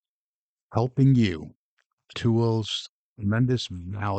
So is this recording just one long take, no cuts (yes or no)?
no